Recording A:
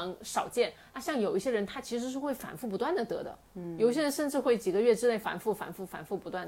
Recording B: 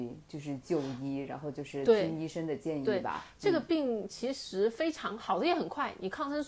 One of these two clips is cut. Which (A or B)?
A